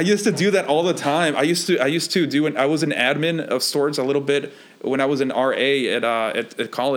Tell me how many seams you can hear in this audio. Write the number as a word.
zero